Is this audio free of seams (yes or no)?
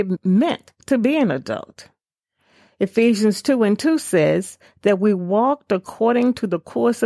yes